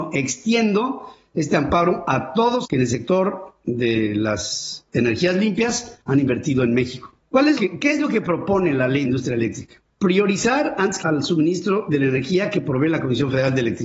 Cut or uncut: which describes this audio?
cut